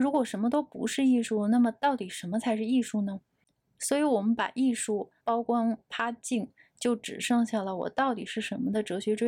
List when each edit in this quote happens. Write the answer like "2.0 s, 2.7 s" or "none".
5.2 s